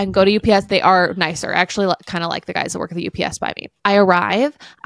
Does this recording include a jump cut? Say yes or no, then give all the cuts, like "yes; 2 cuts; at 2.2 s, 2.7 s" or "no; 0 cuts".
no; 0 cuts